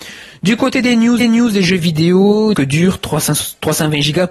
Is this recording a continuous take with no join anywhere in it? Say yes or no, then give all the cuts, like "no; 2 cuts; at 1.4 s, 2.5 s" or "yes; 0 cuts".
no; 2 cuts; at 1.2 s, 2.5 s